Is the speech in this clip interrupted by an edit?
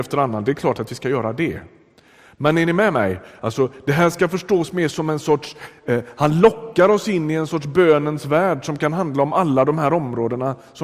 no; 0 cuts

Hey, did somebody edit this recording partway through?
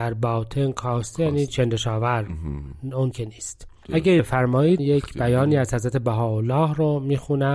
yes; 4 cuts; at 1.5 s, 3.1 s, 4.2 s, 4.8 s

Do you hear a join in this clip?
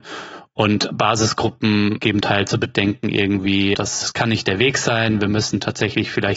yes; 2 cuts; at 2.2 s, 3.7 s

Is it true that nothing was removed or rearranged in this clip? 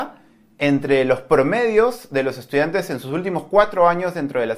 yes; 0 cuts

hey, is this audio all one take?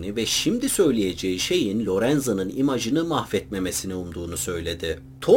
yes; 0 cuts

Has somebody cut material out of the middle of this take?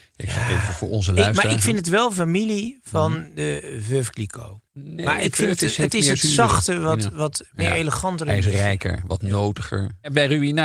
yes; 1 cut; at 4.7 s

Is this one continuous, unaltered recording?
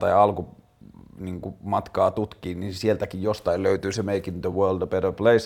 yes; 0 cuts

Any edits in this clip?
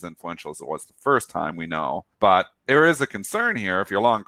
yes; 1 cut; at 2.1 s

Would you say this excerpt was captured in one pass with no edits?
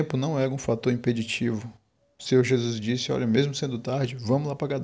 yes; 0 cuts

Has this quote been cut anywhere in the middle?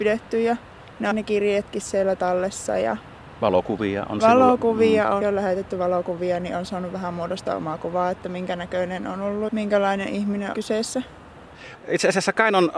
yes; 4 cuts; at 1.1 s, 5.2 s, 9.5 s, 10.5 s

